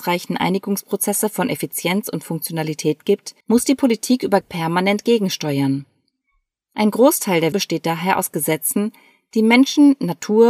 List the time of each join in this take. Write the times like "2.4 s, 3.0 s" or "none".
3.4 s, 4.4 s, 7.5 s